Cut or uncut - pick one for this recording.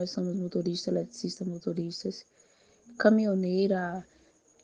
uncut